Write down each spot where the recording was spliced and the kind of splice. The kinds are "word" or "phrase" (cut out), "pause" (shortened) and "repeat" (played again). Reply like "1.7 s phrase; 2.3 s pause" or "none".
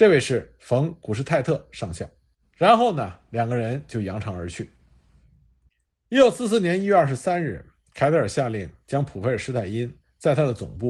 none